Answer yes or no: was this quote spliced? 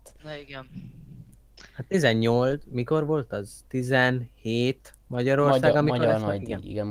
no